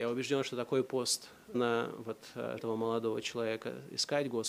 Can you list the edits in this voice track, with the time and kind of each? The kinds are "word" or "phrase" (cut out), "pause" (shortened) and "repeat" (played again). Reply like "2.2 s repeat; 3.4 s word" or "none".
1.5 s word; 2.6 s word